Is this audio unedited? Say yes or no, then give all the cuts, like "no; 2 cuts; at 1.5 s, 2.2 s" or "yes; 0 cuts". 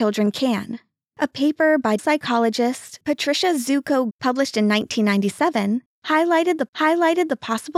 no; 3 cuts; at 2.0 s, 4.1 s, 6.7 s